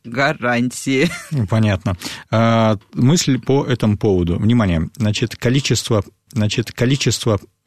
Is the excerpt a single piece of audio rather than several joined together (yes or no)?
no